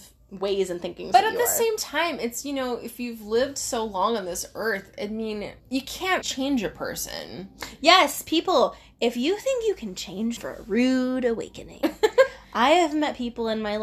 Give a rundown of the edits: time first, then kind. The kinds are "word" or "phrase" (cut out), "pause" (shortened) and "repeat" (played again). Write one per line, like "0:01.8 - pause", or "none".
0:02.4 - word
0:05.6 - pause
0:06.2 - word
0:10.4 - phrase

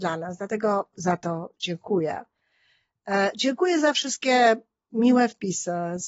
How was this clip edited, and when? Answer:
0:00.9 - word

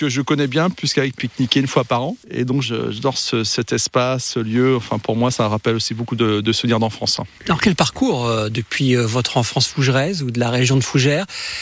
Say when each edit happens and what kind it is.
0:01.2 - phrase
0:02.2 - pause
0:02.6 - word
0:05.3 - word
0:07.4 - pause

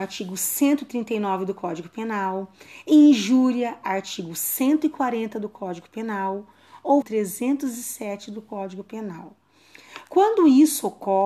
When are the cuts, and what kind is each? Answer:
0:07.0 - phrase

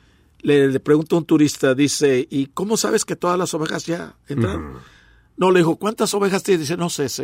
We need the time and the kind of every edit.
none

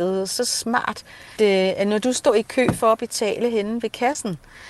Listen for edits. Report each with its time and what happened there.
0:01.4 - word

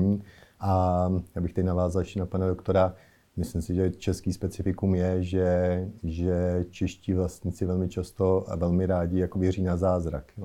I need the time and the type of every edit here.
none

